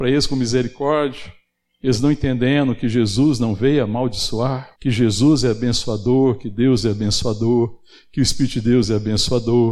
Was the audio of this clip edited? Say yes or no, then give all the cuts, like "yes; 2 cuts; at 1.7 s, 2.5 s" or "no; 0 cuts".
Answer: yes; 1 cut; at 4.8 s